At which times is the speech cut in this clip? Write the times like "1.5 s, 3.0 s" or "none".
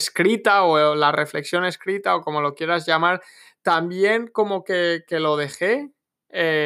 none